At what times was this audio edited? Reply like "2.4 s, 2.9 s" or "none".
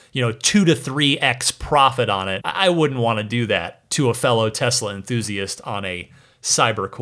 2.4 s